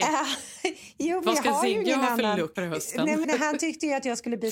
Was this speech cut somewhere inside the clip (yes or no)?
yes